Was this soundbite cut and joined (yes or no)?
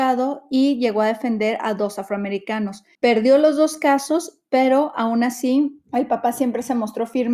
yes